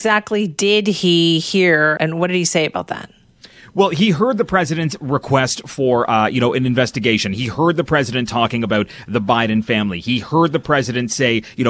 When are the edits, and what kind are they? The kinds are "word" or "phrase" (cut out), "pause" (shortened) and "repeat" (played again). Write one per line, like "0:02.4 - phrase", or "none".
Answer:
0:02.0 - word